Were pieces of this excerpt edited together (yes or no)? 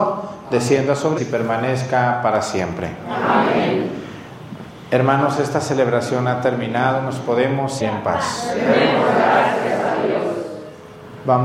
yes